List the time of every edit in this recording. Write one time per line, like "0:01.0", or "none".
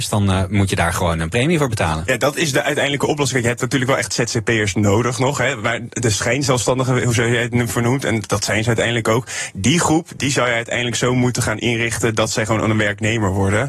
none